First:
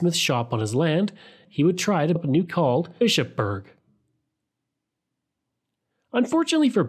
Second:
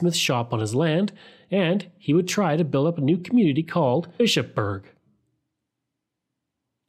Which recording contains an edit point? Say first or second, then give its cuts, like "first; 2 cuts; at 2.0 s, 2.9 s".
first; 3 cuts; at 1.4 s, 2.2 s, 2.5 s